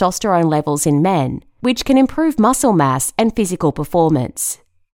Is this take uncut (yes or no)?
yes